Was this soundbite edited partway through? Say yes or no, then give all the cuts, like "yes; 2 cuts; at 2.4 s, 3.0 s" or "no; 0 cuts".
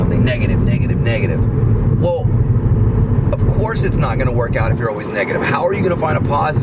no; 0 cuts